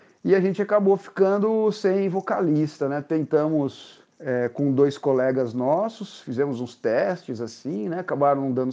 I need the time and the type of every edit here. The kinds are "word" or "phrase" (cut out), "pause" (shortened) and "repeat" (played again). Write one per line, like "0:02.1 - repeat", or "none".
0:04.1 - pause

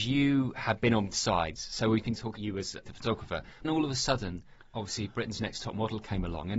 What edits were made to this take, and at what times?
0:01.1 - word
0:02.0 - word
0:02.4 - word
0:02.8 - word
0:03.6 - word

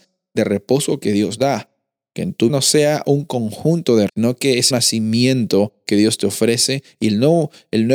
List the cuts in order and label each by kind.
0:01.4 - word
0:02.5 - word
0:04.1 - word
0:04.7 - word

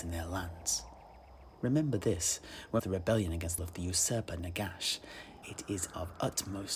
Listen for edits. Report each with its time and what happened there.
0:01.5 - pause
0:02.8 - phrase
0:03.6 - phrase
0:05.4 - word

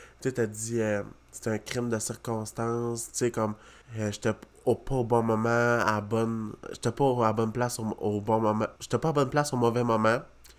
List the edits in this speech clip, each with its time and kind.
0:03.8 - pause
0:08.8 - pause

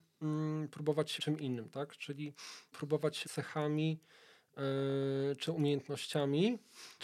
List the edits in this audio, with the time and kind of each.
0:01.2 - word
0:02.7 - word
0:03.2 - word

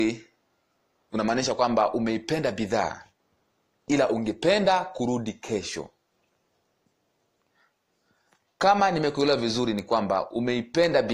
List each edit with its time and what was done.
none

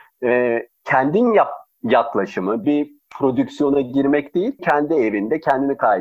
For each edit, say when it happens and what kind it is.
0:02.6 - word
0:04.6 - word

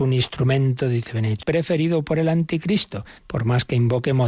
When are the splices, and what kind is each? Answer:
0:01.4 - word
0:03.2 - pause

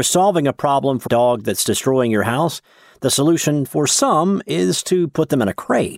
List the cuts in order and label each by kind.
0:01.1 - word

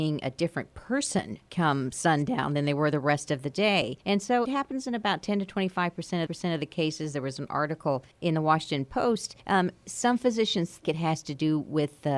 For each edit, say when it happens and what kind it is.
0:01.5 - word
0:04.0 - pause
0:04.4 - phrase
0:06.3 - repeat
0:08.1 - pause
0:09.4 - pause
0:10.8 - word

